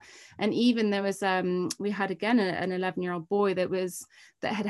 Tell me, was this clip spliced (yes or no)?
no